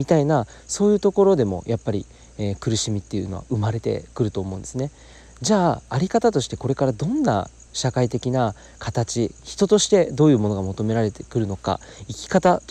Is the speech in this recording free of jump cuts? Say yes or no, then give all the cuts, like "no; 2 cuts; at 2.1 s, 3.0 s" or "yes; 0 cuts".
yes; 0 cuts